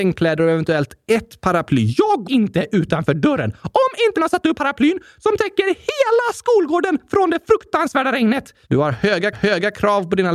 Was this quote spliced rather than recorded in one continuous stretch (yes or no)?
yes